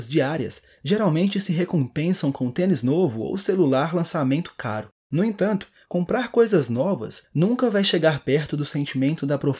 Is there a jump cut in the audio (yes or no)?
no